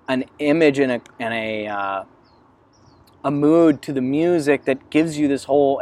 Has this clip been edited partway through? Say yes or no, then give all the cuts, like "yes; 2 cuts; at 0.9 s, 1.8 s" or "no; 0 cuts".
no; 0 cuts